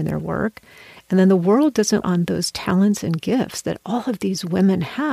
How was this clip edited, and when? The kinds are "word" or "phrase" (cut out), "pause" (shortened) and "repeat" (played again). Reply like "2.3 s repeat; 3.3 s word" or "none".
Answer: 2.0 s phrase